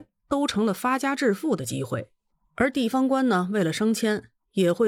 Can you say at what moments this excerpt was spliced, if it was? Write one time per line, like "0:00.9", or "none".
0:02.3